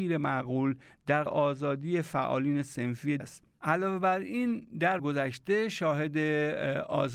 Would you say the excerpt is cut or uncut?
cut